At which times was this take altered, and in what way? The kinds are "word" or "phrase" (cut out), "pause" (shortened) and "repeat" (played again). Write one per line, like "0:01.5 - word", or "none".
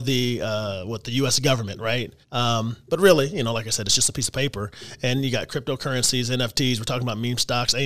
0:02.2 - pause